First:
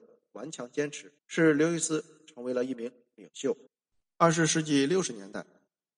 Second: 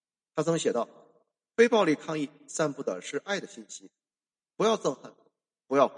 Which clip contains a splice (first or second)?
first